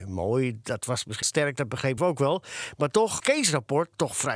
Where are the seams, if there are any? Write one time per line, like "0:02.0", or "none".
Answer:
0:01.2
0:02.0
0:03.2